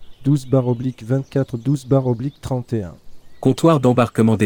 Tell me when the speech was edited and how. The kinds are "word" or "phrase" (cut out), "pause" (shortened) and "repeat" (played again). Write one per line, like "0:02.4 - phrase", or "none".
none